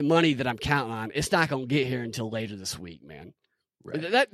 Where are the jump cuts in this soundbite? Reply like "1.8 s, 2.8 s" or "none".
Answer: none